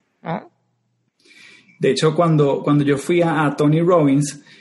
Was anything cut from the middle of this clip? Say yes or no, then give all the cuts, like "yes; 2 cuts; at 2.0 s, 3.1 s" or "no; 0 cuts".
no; 0 cuts